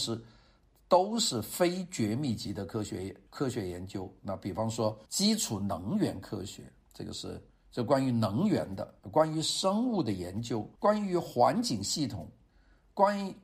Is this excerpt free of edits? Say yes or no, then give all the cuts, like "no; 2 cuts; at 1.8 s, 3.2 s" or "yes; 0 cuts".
no; 5 cuts; at 3.3 s, 5.1 s, 7.5 s, 9.0 s, 10.8 s